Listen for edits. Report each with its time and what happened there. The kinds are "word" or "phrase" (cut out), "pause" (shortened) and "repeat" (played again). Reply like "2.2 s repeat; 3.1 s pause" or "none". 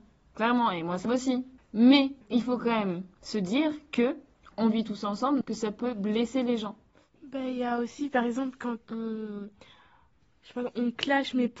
1.1 s word; 2.2 s pause; 5.4 s word; 8.8 s word

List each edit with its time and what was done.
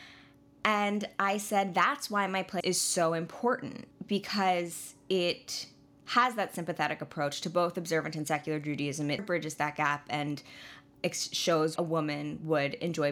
2.6 s word; 9.2 s word; 11.8 s word

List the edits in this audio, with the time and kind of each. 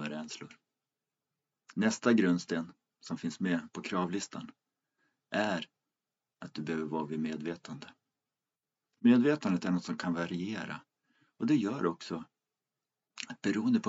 none

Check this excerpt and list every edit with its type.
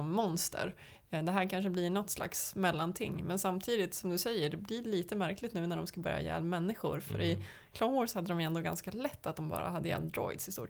none

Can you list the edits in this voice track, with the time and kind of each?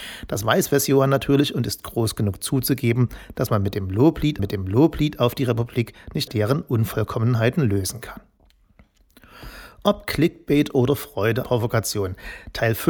4.4 s repeat; 6.3 s word; 11.4 s phrase

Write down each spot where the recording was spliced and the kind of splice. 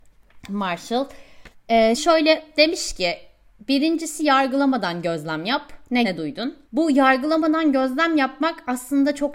1.5 s pause; 2.0 s word; 6.0 s word; 6.6 s pause

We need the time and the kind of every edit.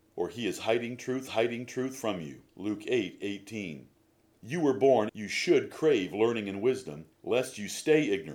1.3 s repeat; 2.5 s pause; 4.2 s pause; 5.1 s word; 7.1 s pause

